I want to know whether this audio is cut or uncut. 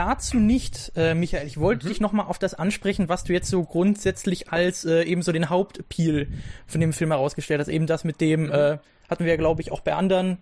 uncut